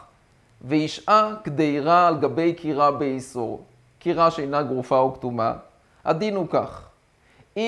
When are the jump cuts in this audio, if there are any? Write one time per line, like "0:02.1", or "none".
none